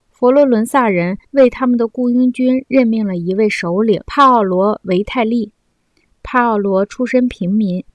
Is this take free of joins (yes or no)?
no